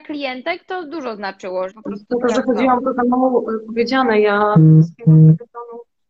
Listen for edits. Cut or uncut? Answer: cut